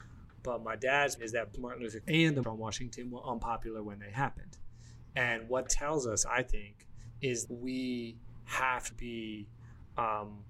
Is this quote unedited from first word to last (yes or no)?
no